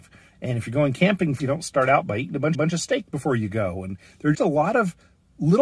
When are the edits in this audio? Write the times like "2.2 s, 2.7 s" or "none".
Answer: 1.4 s, 2.5 s, 4.3 s